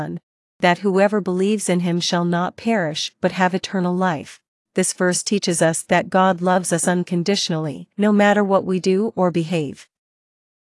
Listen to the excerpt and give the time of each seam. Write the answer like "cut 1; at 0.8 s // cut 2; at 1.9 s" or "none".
cut 1; at 4.5 s // cut 2; at 7.9 s